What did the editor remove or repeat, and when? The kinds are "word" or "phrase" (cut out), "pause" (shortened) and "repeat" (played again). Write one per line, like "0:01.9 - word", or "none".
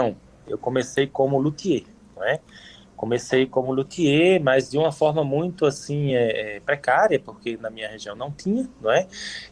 none